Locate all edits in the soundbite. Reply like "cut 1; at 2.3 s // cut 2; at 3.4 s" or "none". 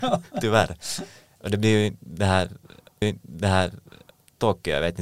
cut 1; at 3.0 s